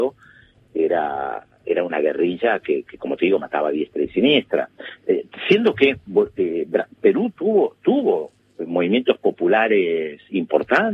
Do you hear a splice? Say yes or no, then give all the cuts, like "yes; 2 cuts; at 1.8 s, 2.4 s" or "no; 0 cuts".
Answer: no; 0 cuts